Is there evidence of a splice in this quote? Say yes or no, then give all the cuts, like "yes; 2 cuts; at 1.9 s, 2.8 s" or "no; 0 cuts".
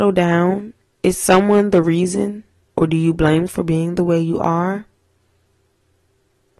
yes; 3 cuts; at 0.9 s, 2.6 s, 3.5 s